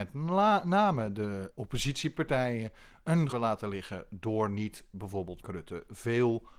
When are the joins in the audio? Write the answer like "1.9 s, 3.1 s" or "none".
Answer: 1.5 s, 3.3 s, 5.4 s